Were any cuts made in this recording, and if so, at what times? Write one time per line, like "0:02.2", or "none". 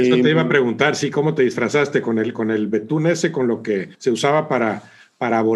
0:03.9